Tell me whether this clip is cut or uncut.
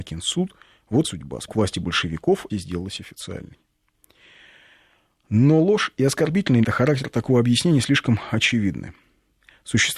cut